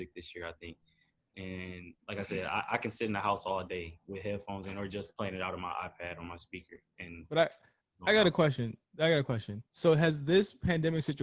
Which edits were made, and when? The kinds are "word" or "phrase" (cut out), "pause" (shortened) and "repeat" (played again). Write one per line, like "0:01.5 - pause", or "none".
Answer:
0:02.0 - pause
0:09.7 - pause